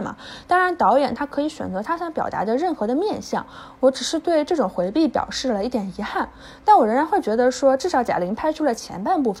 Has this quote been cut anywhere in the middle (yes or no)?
no